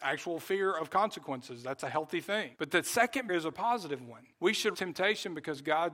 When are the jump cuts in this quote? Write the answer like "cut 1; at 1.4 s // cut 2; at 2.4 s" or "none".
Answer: cut 1; at 2.5 s // cut 2; at 3.3 s // cut 3; at 4.3 s // cut 4; at 4.7 s